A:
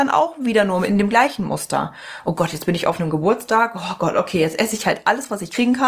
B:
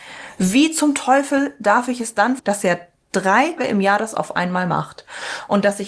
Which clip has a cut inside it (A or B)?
B